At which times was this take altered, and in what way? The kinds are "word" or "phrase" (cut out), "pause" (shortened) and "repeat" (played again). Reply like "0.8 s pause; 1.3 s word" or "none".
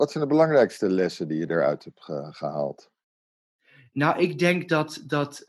none

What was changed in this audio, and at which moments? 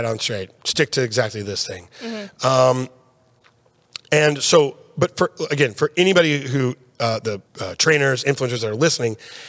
7.4 s pause

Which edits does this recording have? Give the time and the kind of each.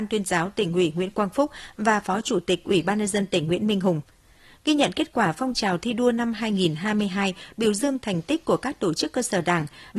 none

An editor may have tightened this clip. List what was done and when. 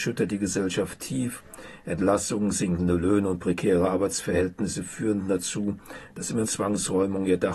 6.4 s phrase

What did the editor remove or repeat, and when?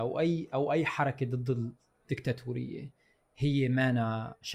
none

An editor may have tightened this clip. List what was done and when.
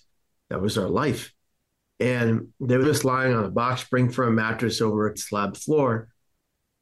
2.8 s word; 5.1 s word

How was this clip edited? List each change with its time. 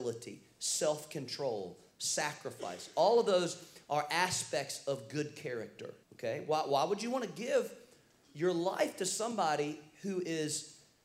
6.0 s pause

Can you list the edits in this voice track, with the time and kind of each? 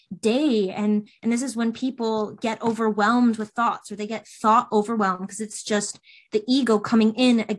none

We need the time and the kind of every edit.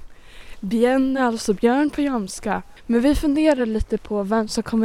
none

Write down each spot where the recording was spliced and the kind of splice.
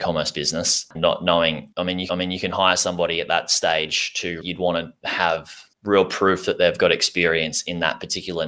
1.0 s word; 1.7 s pause; 2.1 s repeat; 4.4 s phrase

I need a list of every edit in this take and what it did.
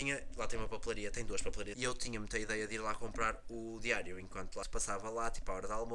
1.7 s word; 4.6 s phrase

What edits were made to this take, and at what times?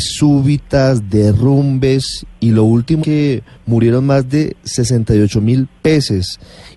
2.3 s pause; 3.0 s word

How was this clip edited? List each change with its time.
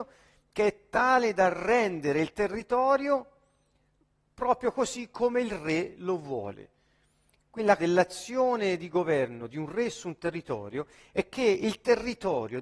7.8 s word

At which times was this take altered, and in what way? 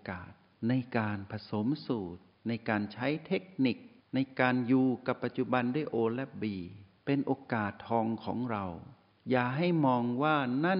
2.3 s pause; 4.0 s pause; 7.0 s pause; 9.1 s pause

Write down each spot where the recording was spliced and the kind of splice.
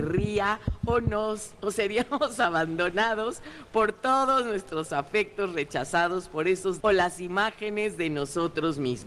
6.8 s word

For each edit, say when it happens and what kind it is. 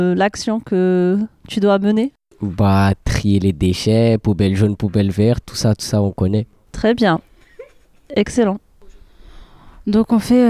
none

